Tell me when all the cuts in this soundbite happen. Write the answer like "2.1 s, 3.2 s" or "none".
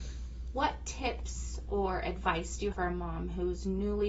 2.7 s